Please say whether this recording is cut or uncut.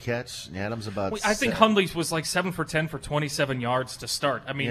uncut